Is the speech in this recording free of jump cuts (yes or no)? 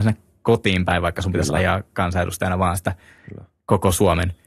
yes